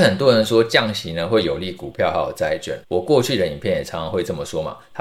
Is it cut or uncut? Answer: cut